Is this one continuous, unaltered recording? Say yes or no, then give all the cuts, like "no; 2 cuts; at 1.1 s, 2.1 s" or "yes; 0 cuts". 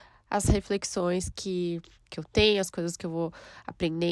yes; 0 cuts